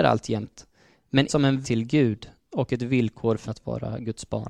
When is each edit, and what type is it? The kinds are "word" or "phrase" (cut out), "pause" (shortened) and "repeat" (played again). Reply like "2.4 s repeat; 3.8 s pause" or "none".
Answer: 1.3 s word; 1.6 s word; 3.4 s word